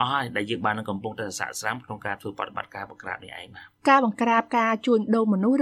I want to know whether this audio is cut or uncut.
cut